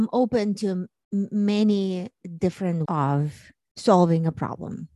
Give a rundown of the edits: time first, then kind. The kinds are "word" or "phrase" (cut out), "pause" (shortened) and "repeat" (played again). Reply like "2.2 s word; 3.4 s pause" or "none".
2.9 s word